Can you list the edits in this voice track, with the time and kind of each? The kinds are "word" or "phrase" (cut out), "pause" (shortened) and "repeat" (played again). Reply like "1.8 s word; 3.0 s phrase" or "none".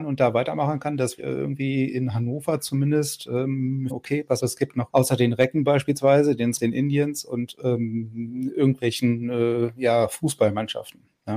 1.2 s word; 3.9 s phrase; 4.4 s word; 4.9 s phrase; 6.6 s word